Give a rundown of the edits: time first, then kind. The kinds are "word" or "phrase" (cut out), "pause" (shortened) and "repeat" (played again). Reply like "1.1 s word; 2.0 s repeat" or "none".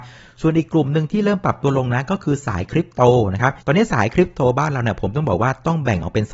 3.6 s pause